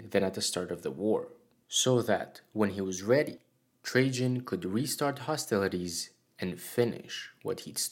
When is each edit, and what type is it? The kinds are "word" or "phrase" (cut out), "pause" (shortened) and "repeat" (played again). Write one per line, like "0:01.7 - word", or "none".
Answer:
none